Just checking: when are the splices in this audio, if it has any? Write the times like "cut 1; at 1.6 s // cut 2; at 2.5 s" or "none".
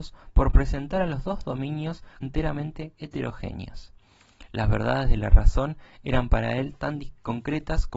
cut 1; at 2.2 s